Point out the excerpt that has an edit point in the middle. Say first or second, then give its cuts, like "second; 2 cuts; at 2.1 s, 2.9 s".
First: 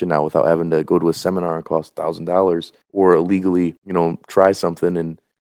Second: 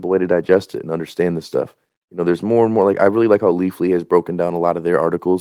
first; 2 cuts; at 2.8 s, 3.8 s